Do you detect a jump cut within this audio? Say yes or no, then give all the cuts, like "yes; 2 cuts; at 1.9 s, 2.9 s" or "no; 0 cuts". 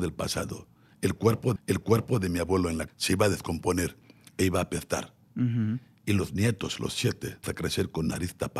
yes; 3 cuts; at 1.6 s, 2.9 s, 7.4 s